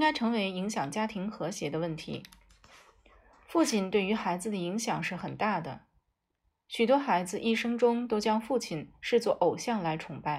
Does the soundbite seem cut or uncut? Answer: uncut